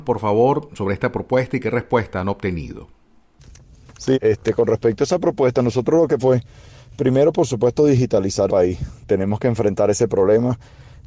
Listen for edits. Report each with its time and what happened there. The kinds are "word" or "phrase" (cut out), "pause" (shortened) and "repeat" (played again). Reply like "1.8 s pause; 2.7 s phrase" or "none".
4.1 s word; 6.2 s word; 8.5 s word